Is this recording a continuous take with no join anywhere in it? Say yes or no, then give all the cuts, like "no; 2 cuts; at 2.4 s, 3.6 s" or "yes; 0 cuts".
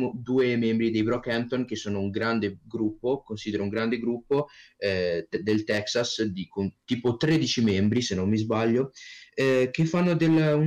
yes; 0 cuts